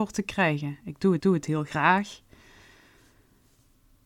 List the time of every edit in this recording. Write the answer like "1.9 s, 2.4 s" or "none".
1.2 s